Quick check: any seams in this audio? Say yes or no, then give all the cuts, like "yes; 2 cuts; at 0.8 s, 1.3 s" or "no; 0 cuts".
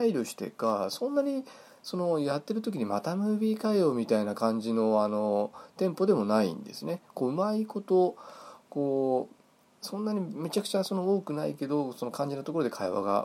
no; 0 cuts